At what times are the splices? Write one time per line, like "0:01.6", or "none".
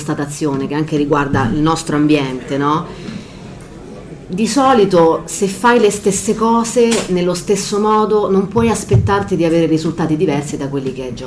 none